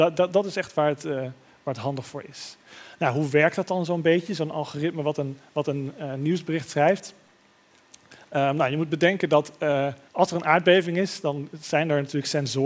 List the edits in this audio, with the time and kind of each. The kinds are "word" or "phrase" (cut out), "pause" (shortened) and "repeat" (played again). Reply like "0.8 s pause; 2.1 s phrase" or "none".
10.1 s pause